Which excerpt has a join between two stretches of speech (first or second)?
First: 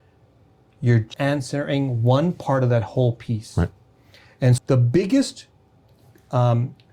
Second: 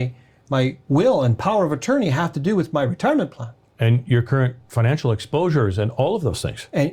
first